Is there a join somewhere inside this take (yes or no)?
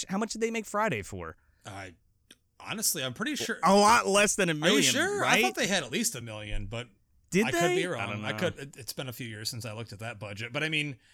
no